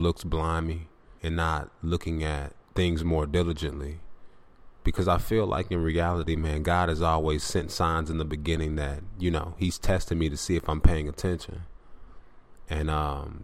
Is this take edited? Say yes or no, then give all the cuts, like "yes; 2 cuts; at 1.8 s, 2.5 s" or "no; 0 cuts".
yes; 2 cuts; at 1.2 s, 2.6 s